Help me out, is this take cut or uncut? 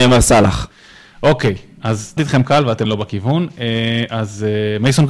cut